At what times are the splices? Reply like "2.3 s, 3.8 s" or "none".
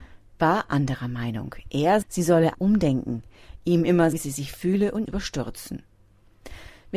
2.0 s, 2.5 s, 4.1 s, 5.1 s